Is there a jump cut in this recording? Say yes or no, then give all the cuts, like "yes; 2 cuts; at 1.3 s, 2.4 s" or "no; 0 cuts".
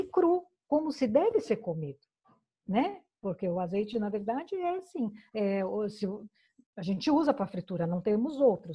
no; 0 cuts